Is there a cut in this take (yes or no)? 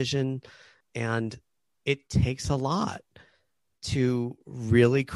no